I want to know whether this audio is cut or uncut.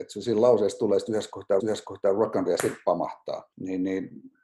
cut